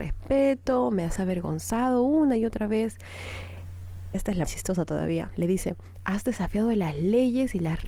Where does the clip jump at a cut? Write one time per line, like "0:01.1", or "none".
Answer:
0:01.2
0:04.1
0:04.4